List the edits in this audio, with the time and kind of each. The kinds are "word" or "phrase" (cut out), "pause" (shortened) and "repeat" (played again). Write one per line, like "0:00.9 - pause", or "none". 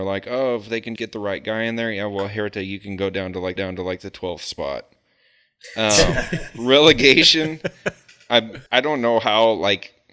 0:01.0 - word
0:03.6 - repeat
0:08.7 - pause